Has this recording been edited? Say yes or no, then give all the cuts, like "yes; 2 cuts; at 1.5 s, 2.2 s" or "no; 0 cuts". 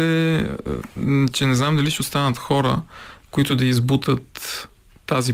no; 0 cuts